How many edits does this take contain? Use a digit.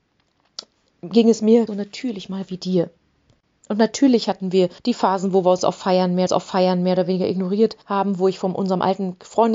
5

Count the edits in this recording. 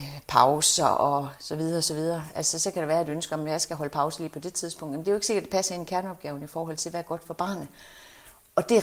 0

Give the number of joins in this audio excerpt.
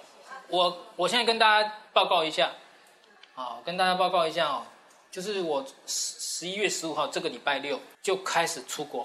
2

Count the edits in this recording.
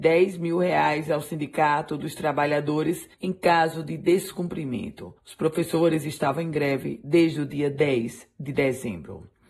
2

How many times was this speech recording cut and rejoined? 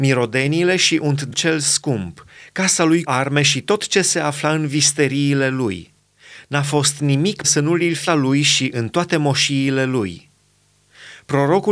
4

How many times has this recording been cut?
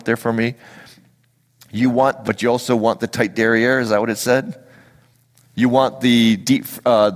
1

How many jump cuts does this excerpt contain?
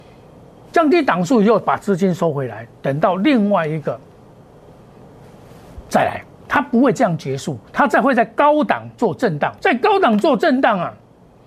2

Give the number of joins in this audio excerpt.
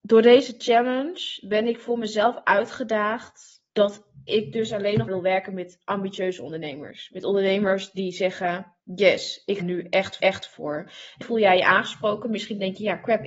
6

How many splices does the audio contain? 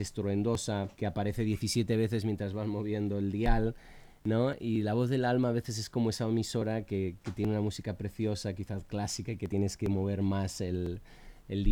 1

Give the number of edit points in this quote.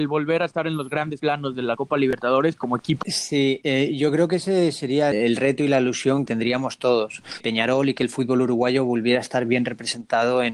3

